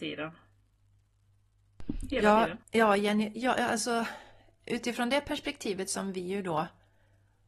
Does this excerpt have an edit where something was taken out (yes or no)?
yes